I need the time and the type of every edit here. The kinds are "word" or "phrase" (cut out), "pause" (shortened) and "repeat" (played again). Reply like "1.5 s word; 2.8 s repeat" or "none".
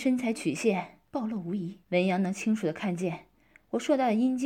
1.1 s pause; 1.8 s pause